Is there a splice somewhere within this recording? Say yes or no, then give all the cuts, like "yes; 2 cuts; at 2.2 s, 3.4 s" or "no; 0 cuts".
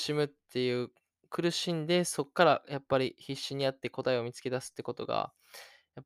no; 0 cuts